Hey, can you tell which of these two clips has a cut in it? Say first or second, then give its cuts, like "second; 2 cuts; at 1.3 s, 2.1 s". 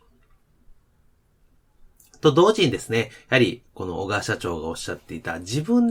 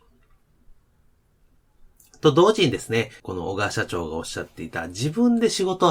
second; 1 cut; at 3.2 s